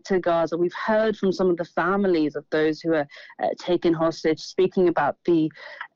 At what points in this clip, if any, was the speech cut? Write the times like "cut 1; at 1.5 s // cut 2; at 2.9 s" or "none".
none